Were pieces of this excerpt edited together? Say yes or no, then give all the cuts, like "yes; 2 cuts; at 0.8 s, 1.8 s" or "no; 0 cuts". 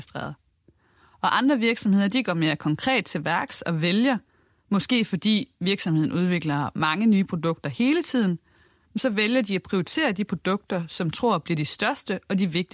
no; 0 cuts